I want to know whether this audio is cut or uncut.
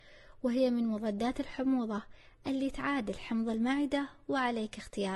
uncut